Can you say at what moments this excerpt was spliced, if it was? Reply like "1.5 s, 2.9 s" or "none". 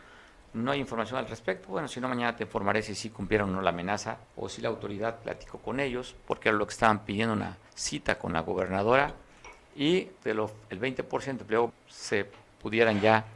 4.2 s, 7.7 s, 10.2 s, 11.7 s